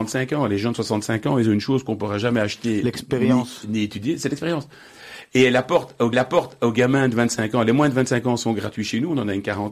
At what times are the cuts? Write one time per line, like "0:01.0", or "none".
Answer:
0:06.1